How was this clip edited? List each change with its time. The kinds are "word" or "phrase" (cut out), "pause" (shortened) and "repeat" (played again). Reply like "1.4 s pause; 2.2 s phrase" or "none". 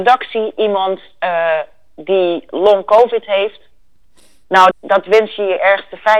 4.7 s word